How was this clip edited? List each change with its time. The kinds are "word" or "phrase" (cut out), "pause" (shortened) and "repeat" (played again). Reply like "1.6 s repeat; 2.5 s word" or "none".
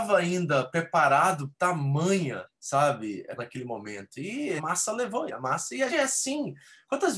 1.5 s word; 2.4 s word; 3.4 s word; 4.6 s word; 5.3 s word; 5.9 s word